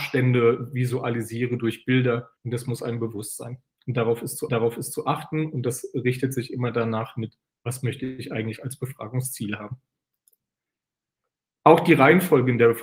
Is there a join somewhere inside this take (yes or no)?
yes